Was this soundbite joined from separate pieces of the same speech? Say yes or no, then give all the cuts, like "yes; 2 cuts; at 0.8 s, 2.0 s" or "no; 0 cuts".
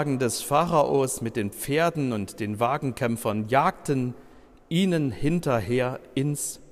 no; 0 cuts